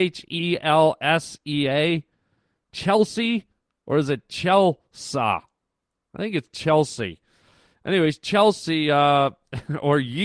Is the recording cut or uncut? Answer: uncut